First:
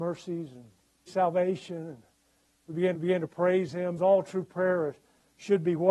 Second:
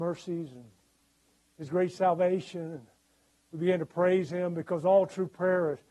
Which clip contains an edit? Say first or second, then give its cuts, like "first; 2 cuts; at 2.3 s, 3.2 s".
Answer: first; 3 cuts; at 1.1 s, 2.9 s, 4.0 s